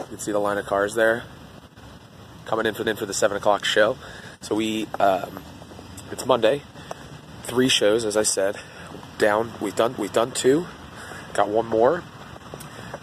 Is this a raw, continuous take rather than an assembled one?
no; 2 cuts; at 2.8 s, 10.0 s

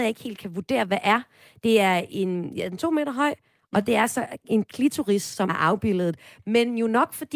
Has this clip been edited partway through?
yes; 1 cut; at 5.5 s

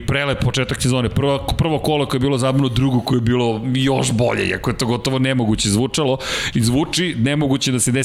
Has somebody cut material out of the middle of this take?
no; 0 cuts

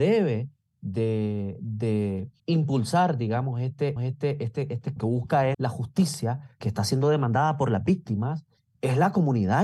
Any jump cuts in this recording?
yes; 6 cuts; at 2.4 s, 4.0 s, 5.0 s, 5.5 s, 6.6 s, 8.6 s

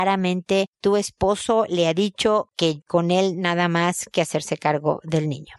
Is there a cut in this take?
no; 0 cuts

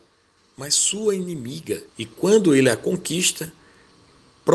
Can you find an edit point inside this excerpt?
yes; 1 cut; at 1.9 s

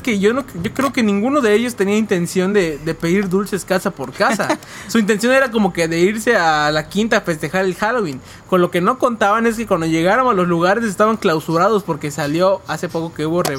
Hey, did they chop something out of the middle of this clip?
no; 0 cuts

